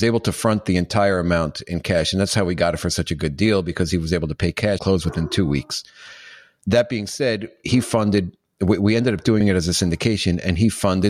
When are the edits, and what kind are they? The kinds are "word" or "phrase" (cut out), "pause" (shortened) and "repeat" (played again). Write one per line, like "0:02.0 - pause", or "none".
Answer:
0:04.8 - word
0:09.4 - phrase